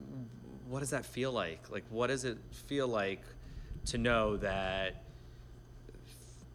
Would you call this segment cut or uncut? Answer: uncut